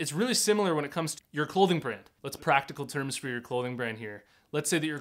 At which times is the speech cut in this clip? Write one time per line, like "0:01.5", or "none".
0:01.2
0:02.4